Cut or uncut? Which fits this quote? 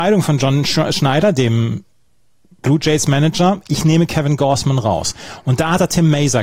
uncut